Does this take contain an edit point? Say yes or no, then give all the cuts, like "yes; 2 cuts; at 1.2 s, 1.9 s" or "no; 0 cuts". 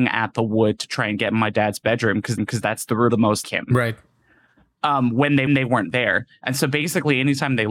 yes; 4 cuts; at 2.4 s, 3.1 s, 3.4 s, 5.5 s